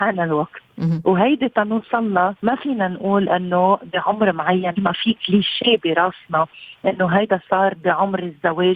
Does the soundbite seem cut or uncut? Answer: cut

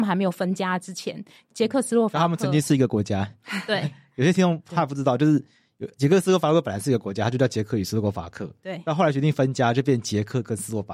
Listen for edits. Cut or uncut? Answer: uncut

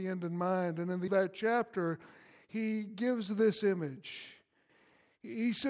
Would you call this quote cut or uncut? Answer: cut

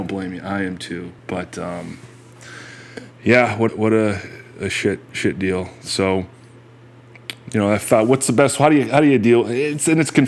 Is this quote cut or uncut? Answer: cut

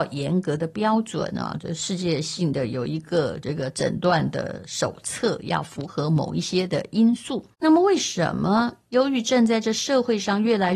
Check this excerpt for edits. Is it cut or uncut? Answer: cut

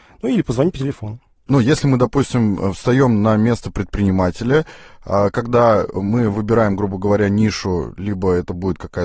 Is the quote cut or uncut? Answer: uncut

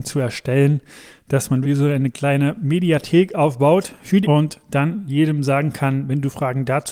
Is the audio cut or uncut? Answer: cut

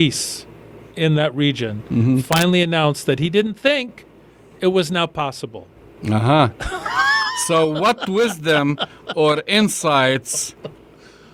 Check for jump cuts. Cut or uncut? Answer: uncut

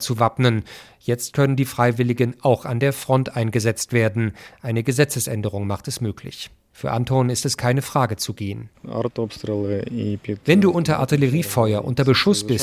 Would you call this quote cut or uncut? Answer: uncut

